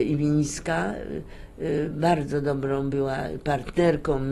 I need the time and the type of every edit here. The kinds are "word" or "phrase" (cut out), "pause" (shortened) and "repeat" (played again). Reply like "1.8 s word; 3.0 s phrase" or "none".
none